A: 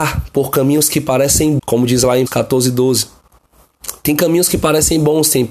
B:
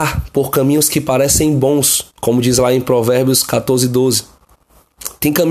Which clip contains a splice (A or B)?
A